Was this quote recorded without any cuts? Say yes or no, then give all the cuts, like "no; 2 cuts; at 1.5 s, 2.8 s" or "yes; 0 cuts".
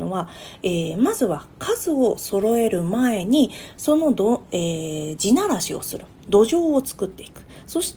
yes; 0 cuts